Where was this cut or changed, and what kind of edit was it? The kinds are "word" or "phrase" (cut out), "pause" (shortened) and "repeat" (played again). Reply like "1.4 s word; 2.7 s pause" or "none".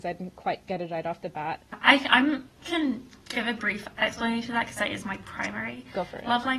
none